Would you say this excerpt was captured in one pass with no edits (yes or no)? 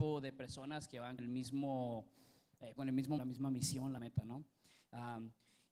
no